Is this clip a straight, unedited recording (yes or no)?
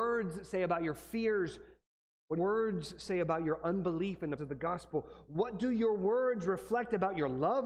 no